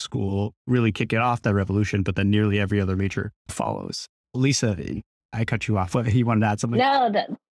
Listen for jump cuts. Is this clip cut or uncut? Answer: cut